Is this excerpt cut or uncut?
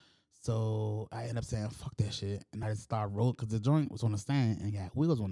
uncut